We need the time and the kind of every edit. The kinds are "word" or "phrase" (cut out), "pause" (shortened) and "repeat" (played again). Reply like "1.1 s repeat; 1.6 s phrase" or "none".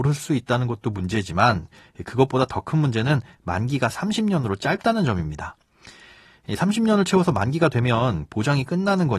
none